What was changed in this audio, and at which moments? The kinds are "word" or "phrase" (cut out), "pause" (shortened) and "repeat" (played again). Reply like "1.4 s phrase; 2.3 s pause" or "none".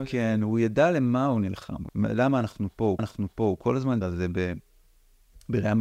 1.9 s word; 3.0 s repeat; 4.0 s word